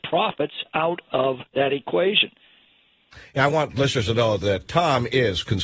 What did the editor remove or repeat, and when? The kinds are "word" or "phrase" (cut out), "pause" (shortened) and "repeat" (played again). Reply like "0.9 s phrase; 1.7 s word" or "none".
1.5 s pause; 4.7 s word